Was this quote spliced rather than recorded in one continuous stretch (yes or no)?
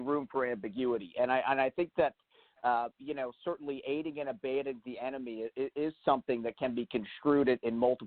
no